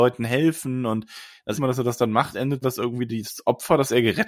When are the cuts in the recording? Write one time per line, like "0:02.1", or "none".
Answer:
0:01.6
0:02.6